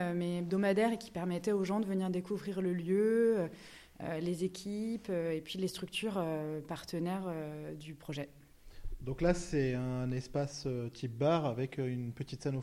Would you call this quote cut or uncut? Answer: uncut